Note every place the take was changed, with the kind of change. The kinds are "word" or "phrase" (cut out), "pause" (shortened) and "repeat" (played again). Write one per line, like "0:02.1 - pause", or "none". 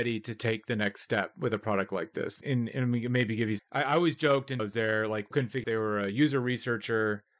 0:03.6 - phrase
0:04.6 - phrase
0:05.3 - word
0:05.6 - word